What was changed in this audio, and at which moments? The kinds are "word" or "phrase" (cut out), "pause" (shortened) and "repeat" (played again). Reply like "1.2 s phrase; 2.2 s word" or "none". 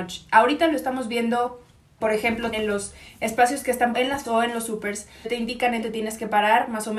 2.0 s word; 2.5 s word; 3.9 s word; 4.2 s word; 5.2 s word; 5.8 s word